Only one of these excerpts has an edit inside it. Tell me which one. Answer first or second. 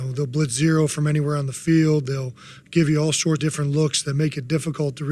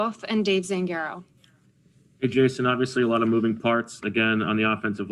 first